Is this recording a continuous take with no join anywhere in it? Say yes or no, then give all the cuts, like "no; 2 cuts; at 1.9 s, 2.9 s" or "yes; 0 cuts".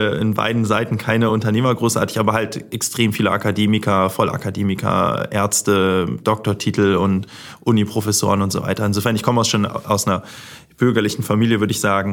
yes; 0 cuts